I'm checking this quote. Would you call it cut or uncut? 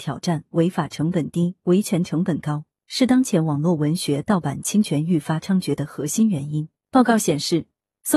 uncut